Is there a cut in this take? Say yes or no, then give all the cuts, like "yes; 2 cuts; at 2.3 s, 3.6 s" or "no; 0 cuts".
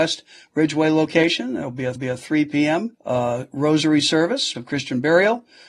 yes; 3 cuts; at 2.0 s, 2.9 s, 4.5 s